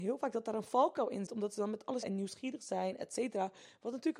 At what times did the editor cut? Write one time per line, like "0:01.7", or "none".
0:01.3
0:02.0